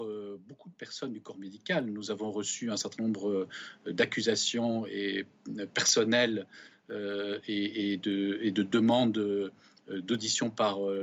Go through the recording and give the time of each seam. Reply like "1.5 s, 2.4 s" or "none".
none